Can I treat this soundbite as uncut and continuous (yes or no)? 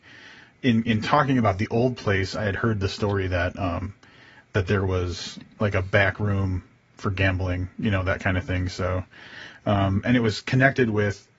yes